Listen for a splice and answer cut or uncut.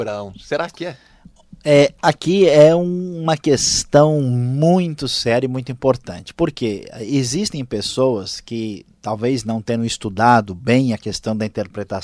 uncut